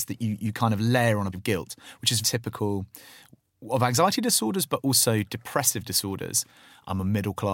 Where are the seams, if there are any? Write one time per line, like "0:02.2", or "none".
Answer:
0:01.3
0:02.2